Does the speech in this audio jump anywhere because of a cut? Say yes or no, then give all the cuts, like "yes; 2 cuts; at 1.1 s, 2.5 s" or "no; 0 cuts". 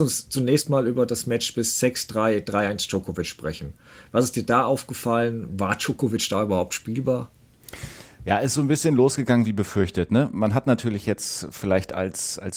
no; 0 cuts